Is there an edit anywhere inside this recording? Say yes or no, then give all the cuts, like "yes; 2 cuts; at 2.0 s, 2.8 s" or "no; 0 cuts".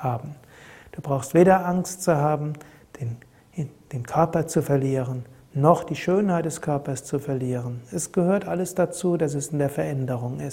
no; 0 cuts